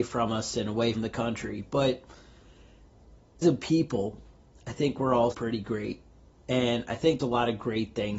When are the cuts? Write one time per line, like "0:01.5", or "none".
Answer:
0:00.9
0:03.4
0:05.3
0:07.2